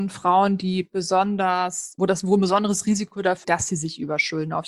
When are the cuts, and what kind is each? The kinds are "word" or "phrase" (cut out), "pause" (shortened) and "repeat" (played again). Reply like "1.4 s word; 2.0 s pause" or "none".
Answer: 2.0 s word; 3.4 s word